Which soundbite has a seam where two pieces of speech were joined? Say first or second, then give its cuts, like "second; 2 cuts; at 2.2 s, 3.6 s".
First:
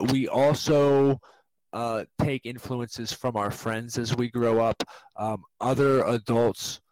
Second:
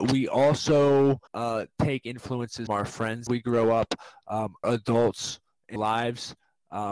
second; 5 cuts; at 1.3 s, 2.7 s, 3.3 s, 4.6 s, 5.8 s